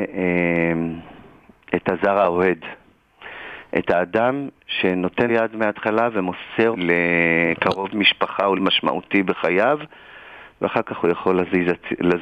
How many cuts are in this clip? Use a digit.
3